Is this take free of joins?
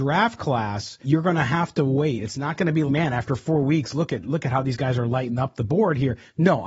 no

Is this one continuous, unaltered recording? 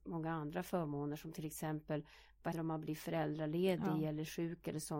no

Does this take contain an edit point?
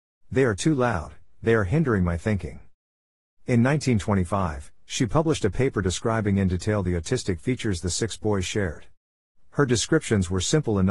no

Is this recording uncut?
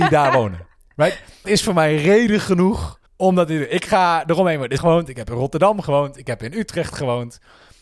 no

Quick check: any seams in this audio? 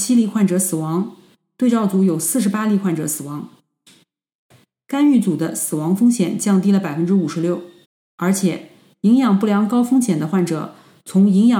yes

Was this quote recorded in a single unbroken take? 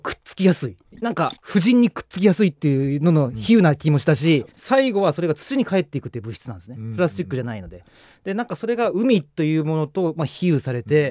no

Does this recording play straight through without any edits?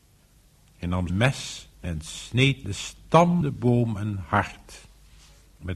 no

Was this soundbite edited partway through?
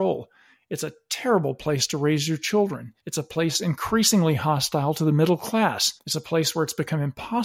yes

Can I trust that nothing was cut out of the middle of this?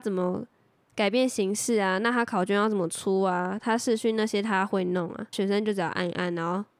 no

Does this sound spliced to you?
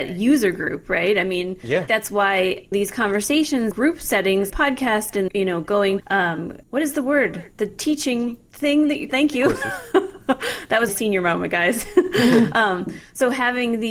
yes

